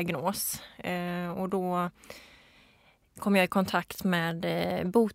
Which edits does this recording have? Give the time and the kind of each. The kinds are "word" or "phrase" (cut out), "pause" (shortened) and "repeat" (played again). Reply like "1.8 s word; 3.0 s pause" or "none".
none

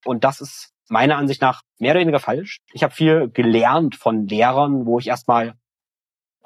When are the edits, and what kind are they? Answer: 2.2 s word

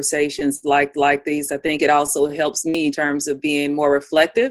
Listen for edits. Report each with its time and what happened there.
0.9 s repeat; 2.9 s phrase

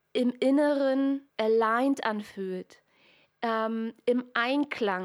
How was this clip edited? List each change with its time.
1.3 s pause

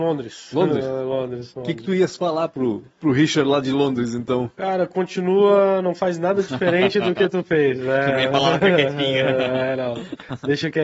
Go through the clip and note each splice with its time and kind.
none

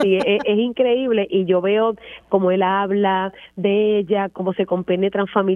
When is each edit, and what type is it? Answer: none

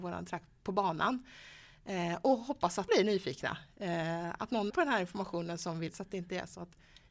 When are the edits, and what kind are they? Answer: 2.9 s word; 4.7 s word; 5.9 s word

